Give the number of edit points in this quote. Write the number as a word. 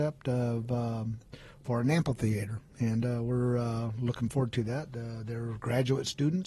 zero